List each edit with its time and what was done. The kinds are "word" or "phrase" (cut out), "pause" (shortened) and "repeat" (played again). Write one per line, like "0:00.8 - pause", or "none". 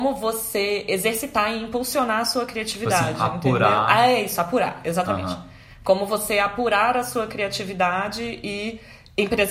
none